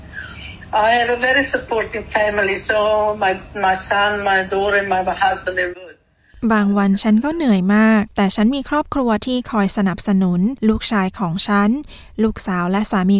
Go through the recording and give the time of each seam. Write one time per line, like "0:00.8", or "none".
0:05.7